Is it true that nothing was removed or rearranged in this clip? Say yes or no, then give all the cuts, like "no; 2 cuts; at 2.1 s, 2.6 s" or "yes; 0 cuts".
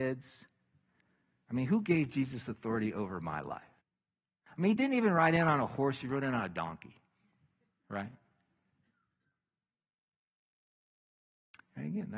no; 1 cut; at 3.8 s